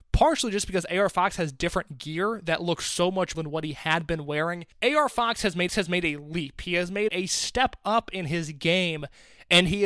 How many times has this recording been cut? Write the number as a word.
four